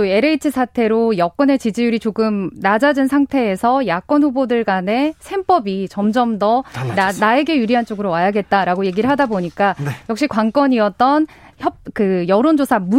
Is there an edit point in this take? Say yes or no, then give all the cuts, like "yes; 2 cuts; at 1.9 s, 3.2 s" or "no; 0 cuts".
no; 0 cuts